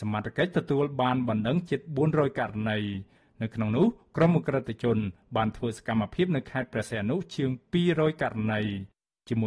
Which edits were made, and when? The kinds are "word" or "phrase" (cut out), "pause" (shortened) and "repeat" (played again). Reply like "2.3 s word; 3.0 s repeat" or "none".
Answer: none